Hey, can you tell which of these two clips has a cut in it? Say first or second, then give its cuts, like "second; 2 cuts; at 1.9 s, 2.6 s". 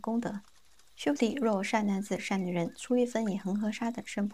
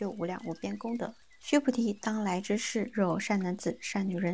second; 1 cut; at 1.2 s